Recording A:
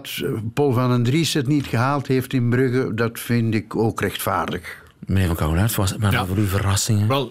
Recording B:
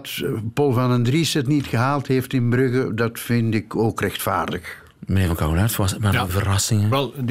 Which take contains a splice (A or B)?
B